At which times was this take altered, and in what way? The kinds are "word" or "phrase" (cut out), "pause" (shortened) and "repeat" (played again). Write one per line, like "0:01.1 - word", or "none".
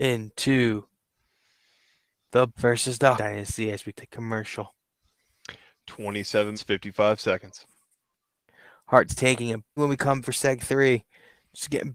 0:02.5 - word
0:03.1 - word
0:03.9 - word
0:06.5 - word
0:09.1 - word
0:09.8 - word
0:10.2 - word